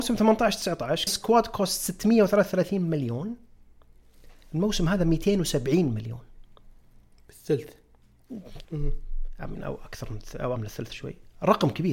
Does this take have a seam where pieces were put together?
yes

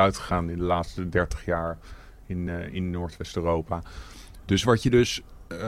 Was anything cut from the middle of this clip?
no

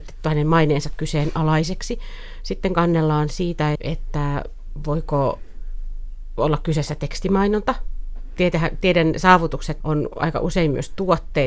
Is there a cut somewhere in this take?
yes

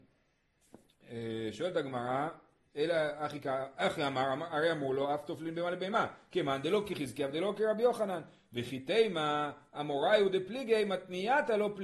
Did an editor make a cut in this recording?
no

